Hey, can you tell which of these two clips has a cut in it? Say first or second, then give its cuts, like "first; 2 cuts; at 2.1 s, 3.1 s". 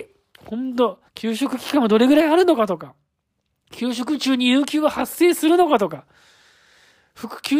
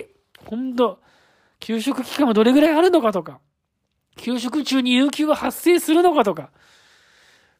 first; 1 cut; at 1.1 s